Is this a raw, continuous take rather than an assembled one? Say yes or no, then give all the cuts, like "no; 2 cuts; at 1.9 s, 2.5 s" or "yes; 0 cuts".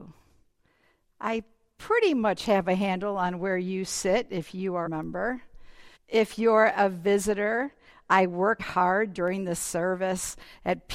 no; 3 cuts; at 4.9 s, 6.0 s, 8.6 s